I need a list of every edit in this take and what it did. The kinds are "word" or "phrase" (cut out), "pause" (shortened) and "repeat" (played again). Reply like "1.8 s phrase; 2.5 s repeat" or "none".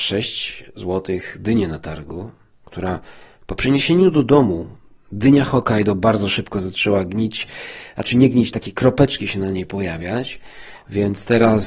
8.5 s word